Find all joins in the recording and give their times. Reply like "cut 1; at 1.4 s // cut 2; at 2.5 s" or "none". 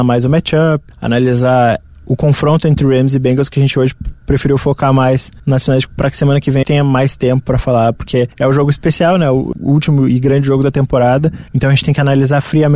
cut 1; at 0.9 s // cut 2; at 5.4 s // cut 3; at 5.9 s // cut 4; at 6.6 s // cut 5; at 8.3 s // cut 6; at 9.5 s // cut 7; at 11.5 s